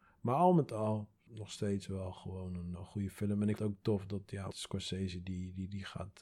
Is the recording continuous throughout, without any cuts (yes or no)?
no